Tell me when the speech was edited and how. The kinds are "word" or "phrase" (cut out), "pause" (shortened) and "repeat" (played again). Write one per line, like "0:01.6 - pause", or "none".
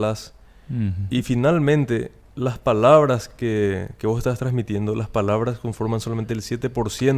none